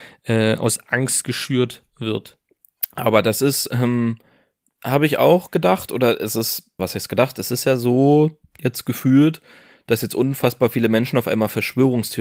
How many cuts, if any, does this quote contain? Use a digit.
1